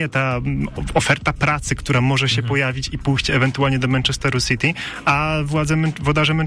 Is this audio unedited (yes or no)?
yes